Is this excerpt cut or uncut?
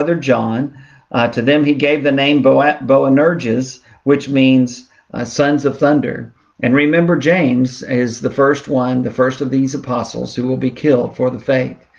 uncut